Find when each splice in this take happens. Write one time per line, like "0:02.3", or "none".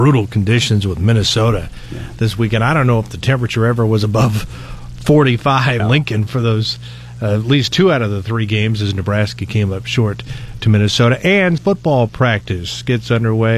0:05.8
0:11.6

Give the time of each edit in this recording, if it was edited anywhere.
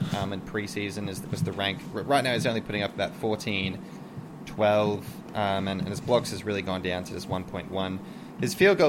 none

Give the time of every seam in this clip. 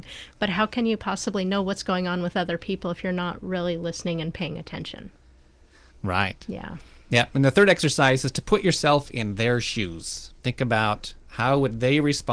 0:10.4

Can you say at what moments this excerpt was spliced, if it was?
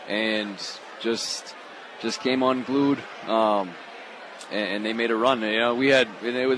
none

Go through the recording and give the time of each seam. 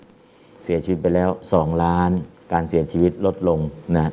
0:02.3

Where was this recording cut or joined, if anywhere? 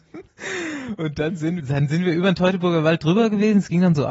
0:01.6

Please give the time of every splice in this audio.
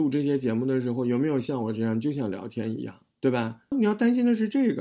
0:03.1

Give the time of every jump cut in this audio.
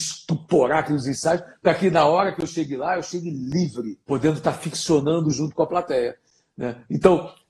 0:04.0

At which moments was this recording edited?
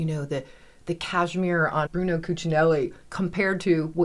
0:01.9

